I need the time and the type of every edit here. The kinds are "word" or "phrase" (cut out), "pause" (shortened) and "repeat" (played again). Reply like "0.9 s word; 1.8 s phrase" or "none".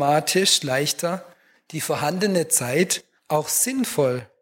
3.2 s pause